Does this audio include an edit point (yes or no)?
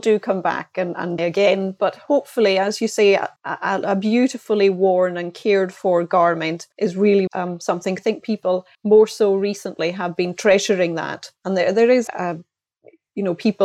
yes